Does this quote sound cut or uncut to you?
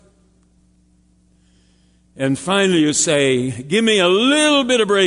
uncut